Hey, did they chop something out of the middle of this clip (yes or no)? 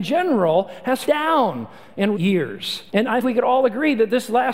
yes